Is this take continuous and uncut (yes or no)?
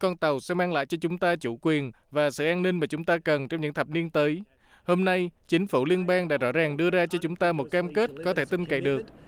yes